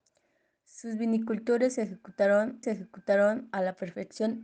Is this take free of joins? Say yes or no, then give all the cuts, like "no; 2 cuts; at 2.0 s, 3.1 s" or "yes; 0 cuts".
no; 1 cut; at 2.6 s